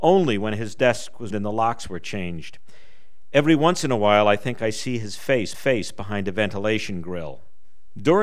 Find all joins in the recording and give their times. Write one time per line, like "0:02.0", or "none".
0:01.3
0:05.5